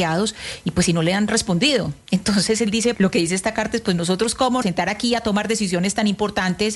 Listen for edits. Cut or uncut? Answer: cut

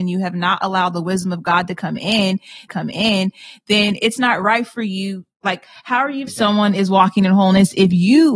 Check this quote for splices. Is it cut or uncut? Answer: cut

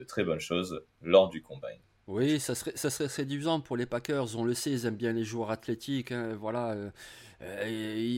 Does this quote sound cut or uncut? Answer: uncut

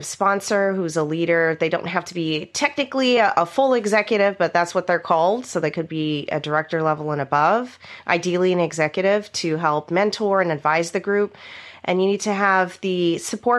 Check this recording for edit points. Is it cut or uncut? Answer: uncut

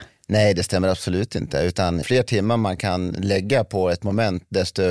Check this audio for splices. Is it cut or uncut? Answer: cut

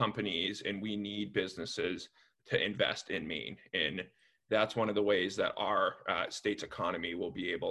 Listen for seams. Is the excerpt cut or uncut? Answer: uncut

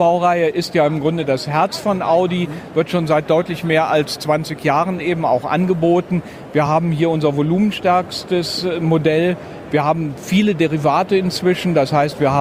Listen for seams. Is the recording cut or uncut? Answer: uncut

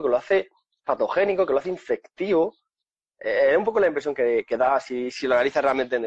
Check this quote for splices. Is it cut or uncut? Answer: uncut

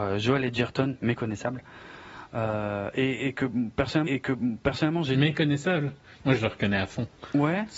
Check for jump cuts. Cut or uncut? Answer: cut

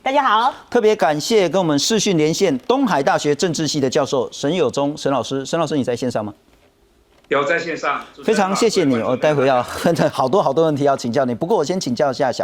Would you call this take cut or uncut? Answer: uncut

